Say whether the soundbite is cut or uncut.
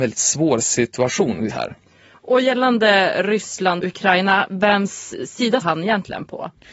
cut